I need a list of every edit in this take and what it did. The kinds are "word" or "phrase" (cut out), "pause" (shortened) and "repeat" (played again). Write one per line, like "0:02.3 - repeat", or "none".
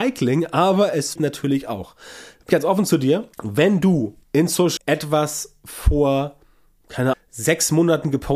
0:01.2 - word
0:02.5 - word
0:03.3 - pause
0:04.2 - pause
0:04.8 - word
0:07.1 - word